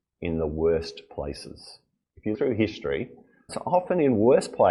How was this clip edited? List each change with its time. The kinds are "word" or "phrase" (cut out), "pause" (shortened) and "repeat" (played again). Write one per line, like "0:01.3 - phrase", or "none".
0:01.9 - pause
0:02.3 - word
0:03.5 - word